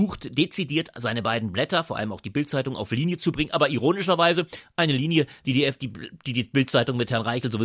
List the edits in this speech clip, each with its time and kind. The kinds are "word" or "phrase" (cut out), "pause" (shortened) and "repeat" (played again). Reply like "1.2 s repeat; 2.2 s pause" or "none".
none